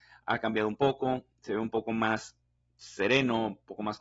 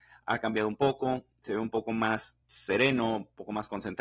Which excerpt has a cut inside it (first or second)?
second